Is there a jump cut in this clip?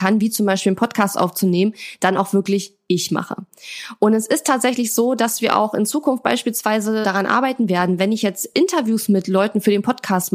yes; 1 cut; at 7.0 s

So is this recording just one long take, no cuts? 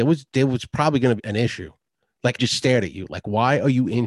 no; 2 cuts; at 1.2 s, 2.4 s

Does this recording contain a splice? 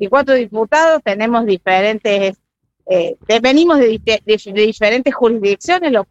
no; 0 cuts

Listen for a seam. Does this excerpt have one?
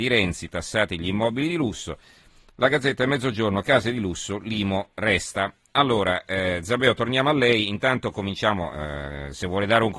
no; 0 cuts

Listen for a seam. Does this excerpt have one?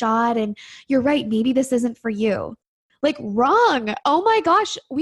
no; 0 cuts

